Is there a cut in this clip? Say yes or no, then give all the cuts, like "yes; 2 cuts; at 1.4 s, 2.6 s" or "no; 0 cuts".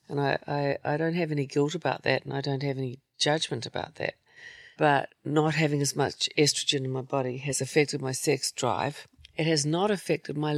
no; 0 cuts